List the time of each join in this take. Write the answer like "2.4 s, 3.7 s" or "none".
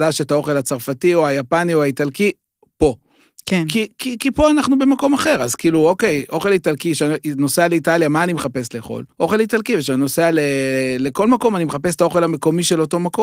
9.1 s

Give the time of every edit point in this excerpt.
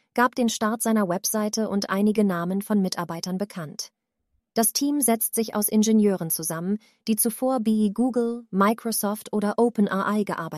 none

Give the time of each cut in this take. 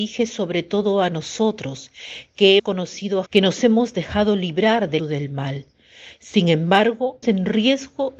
2.6 s, 3.3 s, 5.0 s, 7.2 s

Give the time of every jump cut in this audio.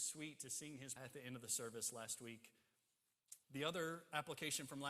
1.0 s, 3.4 s

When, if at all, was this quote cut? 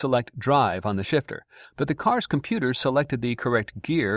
none

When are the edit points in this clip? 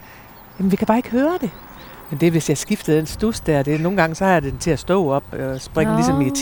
none

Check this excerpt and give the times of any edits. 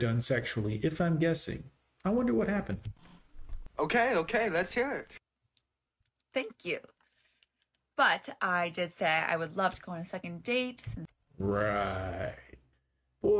none

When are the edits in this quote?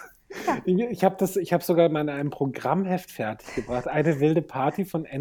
none

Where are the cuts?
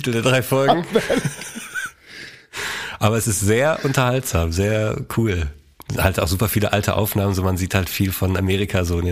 none

